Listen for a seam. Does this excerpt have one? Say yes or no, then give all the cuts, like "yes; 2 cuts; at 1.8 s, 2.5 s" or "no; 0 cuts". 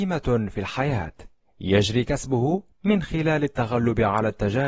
no; 0 cuts